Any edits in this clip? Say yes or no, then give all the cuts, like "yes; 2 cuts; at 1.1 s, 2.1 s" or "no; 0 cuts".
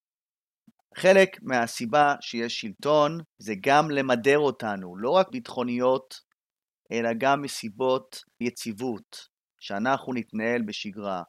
yes; 3 cuts; at 3.3 s, 5.3 s, 8.4 s